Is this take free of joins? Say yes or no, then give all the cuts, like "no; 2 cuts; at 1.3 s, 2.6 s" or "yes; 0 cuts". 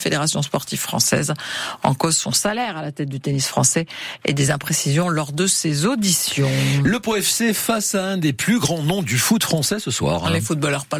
yes; 0 cuts